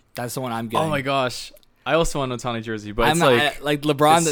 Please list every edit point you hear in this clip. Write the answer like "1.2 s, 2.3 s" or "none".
none